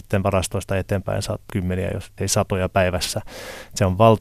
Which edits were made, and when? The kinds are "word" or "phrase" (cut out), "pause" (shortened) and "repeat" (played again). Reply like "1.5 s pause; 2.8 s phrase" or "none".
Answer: 1.5 s phrase; 2.2 s word